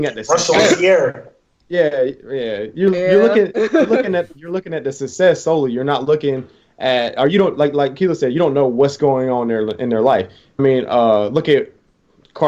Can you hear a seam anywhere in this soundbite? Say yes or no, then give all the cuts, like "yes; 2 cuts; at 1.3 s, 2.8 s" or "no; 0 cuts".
yes; 1 cut; at 10.6 s